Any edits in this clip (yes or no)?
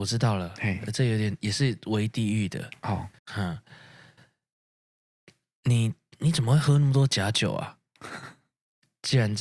yes